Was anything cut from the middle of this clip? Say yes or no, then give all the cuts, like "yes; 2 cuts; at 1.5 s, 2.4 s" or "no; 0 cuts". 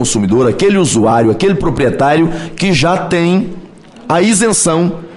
no; 0 cuts